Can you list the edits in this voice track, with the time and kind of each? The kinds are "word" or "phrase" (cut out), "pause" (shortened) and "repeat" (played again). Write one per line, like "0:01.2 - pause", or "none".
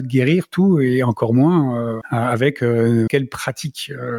0:02.0 - word
0:03.1 - word